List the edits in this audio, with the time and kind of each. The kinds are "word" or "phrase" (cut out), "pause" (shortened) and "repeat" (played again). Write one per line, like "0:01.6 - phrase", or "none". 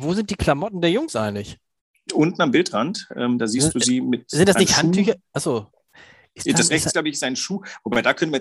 none